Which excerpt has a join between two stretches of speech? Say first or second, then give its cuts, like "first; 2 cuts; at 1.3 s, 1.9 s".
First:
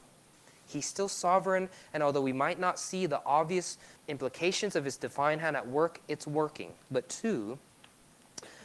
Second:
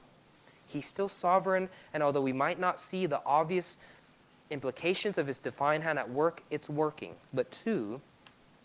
first; 1 cut; at 4.0 s